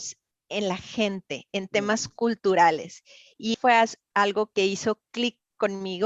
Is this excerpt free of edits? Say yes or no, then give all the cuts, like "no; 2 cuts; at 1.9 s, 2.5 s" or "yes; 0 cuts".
no; 2 cuts; at 3.5 s, 4.5 s